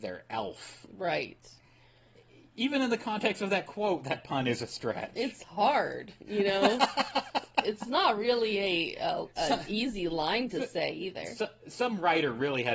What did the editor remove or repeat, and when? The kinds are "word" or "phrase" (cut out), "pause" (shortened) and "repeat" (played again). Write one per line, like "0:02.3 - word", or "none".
none